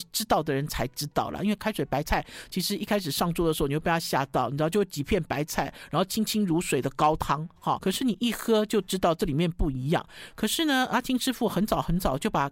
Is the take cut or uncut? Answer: cut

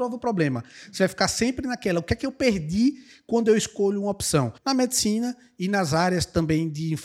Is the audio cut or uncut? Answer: cut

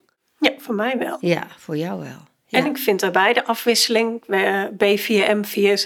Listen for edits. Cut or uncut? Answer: uncut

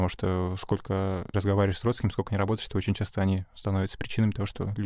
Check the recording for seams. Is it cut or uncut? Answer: cut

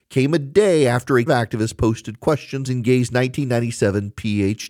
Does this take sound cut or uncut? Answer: cut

